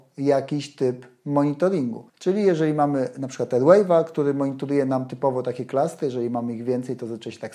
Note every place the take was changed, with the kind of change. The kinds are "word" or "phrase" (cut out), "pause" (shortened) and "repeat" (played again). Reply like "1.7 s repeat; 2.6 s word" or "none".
2.1 s pause